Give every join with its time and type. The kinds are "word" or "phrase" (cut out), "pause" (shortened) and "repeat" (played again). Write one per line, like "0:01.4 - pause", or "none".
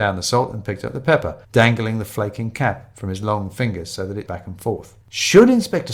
0:01.4 - pause
0:04.3 - word
0:05.0 - pause

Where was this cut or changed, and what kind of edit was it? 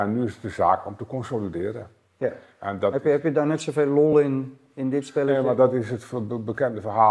none

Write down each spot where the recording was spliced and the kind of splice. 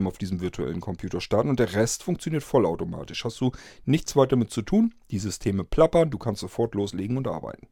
none

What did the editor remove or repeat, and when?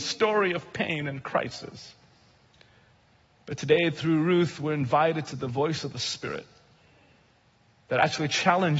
0:05.3 - word

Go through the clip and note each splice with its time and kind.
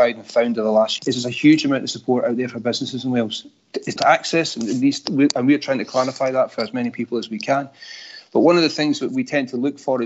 0:01.0 - word
0:04.0 - word

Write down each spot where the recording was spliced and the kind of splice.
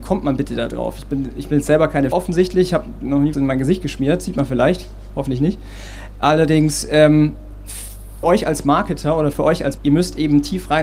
0:02.1 - word
0:03.3 - word
0:08.2 - word
0:09.3 - word
0:09.8 - word

